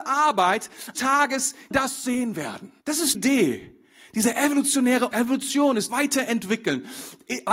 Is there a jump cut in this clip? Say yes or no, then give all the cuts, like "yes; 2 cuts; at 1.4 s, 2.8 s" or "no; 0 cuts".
yes; 6 cuts; at 0.9 s, 1.7 s, 2.8 s, 3.1 s, 5.1 s, 5.9 s